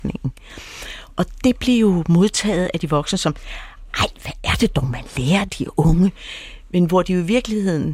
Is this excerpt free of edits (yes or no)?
yes